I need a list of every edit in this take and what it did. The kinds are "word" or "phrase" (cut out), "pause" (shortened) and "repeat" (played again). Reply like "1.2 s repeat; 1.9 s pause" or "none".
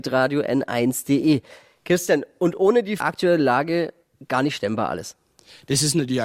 3.0 s phrase

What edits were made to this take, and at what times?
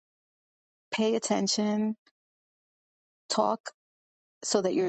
none

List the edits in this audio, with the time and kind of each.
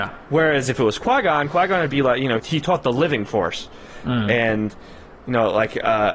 2.4 s word

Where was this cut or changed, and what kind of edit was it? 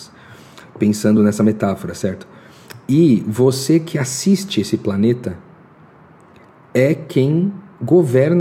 none

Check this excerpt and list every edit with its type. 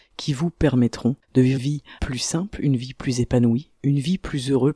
1.2 s pause; 1.6 s word; 2.0 s pause

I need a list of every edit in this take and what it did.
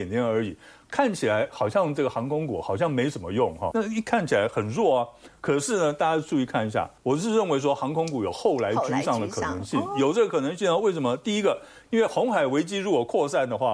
3.7 s word; 7.0 s pause

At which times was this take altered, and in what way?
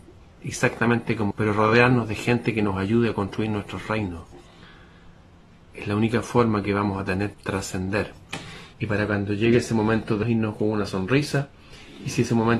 1.3 s word; 7.3 s word; 8.7 s pause; 10.2 s word

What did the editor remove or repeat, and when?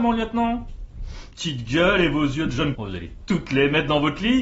1.3 s phrase; 2.8 s word

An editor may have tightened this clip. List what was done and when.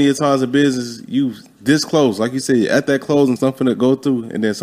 3.4 s word

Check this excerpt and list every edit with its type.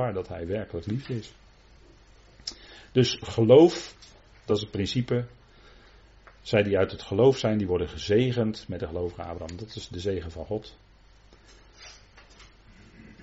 none

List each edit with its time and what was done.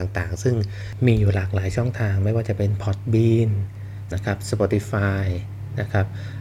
4.1 s word

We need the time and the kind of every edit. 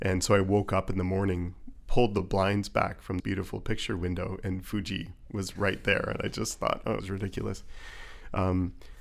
3.2 s word; 7.0 s word

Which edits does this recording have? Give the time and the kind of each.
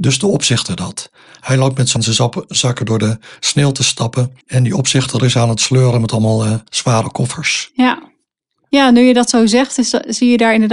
2.0 s word; 4.4 s pause; 6.7 s pause

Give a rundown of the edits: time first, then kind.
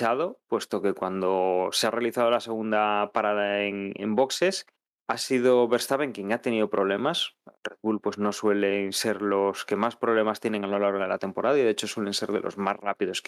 4.8 s pause; 7.6 s pause

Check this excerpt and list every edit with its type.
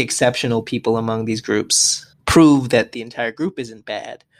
2.1 s pause

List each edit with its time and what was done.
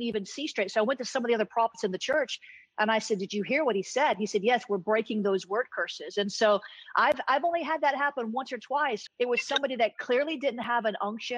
9.1 s word

